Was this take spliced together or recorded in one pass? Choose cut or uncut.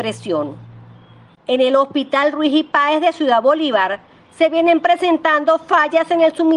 uncut